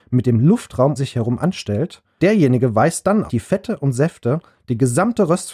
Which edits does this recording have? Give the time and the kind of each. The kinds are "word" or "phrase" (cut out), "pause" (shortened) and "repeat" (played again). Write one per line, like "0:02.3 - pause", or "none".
0:01.0 - word
0:02.2 - word
0:03.3 - phrase